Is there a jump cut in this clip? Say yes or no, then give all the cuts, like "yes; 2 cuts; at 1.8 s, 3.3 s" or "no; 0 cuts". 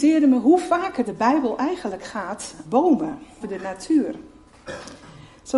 yes; 3 cuts; at 1.0 s, 2.6 s, 3.4 s